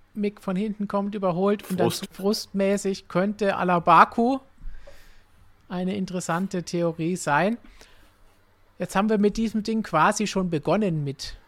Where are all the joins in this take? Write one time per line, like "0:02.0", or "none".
0:02.0